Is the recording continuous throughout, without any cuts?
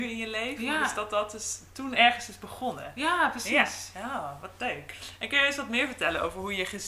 yes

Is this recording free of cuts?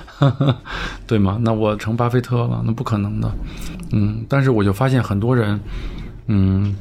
yes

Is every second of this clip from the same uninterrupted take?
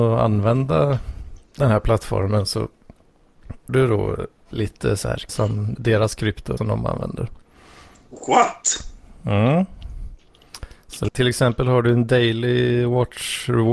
no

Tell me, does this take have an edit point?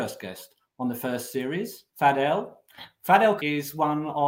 yes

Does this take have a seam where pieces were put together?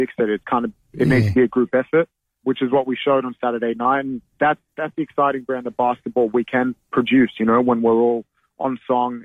yes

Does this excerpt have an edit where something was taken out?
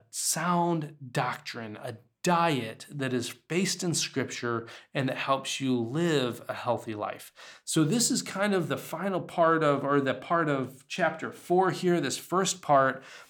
no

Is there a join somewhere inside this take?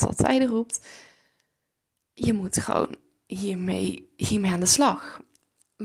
no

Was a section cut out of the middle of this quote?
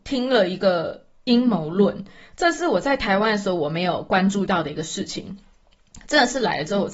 no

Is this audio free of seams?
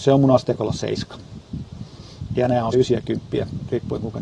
no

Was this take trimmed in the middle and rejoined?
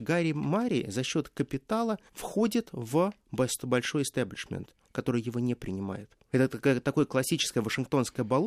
yes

